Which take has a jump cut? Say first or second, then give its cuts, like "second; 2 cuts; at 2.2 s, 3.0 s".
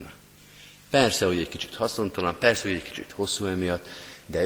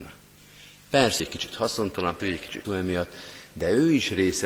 second; 3 cuts; at 1.2 s, 2.2 s, 2.6 s